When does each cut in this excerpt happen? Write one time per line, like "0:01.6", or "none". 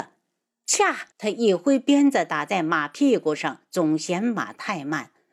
0:01.1